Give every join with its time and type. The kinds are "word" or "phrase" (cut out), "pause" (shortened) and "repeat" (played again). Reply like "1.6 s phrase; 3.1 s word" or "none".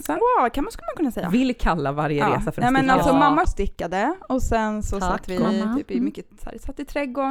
3.4 s phrase